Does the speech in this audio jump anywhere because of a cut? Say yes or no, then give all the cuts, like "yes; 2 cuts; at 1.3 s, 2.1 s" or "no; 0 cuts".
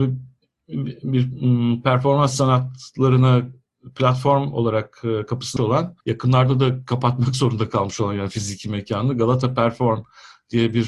yes; 2 cuts; at 5.6 s, 6.0 s